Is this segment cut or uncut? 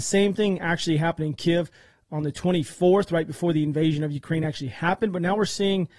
uncut